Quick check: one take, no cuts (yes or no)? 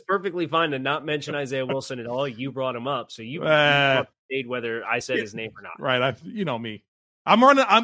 yes